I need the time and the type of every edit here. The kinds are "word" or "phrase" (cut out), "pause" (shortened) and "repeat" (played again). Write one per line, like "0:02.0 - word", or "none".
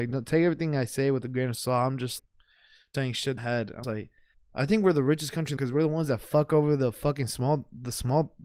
0:02.2 - word
0:02.9 - word
0:03.4 - phrase
0:03.8 - word
0:04.3 - pause
0:05.6 - phrase